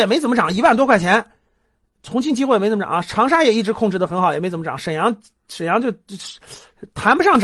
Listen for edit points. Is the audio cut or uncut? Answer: uncut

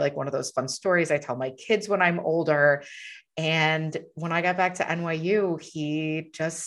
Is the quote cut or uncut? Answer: uncut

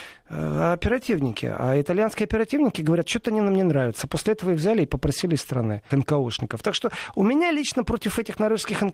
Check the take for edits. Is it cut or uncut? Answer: cut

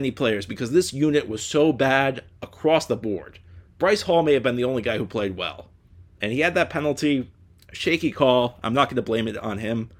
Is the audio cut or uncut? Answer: uncut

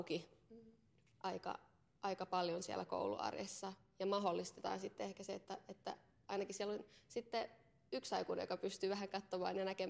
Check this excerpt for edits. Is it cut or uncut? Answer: uncut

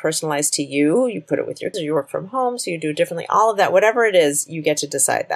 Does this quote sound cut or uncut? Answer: cut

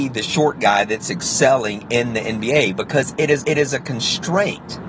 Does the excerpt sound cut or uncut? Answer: cut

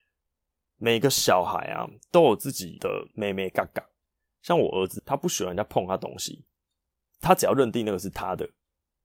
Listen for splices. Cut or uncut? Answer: uncut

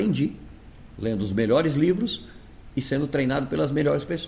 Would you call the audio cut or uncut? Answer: uncut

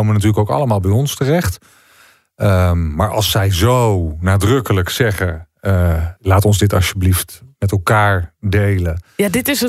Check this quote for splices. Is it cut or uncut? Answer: cut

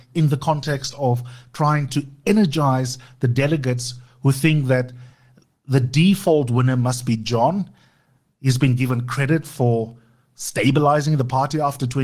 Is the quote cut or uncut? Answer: uncut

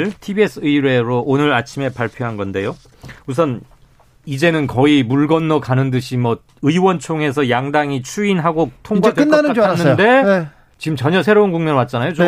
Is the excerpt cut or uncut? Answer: uncut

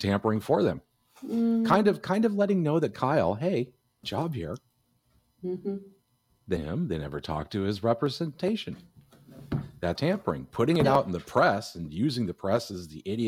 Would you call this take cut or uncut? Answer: cut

